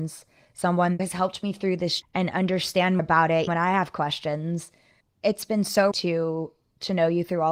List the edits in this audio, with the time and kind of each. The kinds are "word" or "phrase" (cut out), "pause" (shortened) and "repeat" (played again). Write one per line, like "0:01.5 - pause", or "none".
0:01.0 - word
0:02.0 - word
0:03.0 - word
0:03.5 - word
0:05.0 - word
0:05.9 - word